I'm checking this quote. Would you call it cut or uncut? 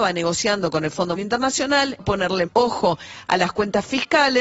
cut